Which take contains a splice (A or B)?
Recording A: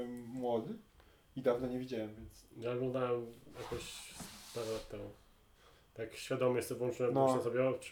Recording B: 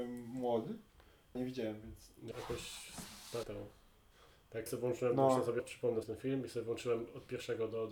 B